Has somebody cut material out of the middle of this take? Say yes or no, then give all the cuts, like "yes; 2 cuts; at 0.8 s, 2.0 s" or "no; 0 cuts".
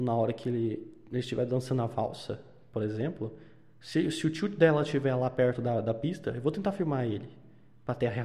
no; 0 cuts